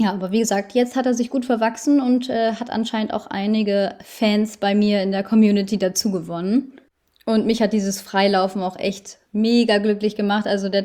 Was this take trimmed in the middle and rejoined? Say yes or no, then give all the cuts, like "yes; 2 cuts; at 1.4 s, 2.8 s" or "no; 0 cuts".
no; 0 cuts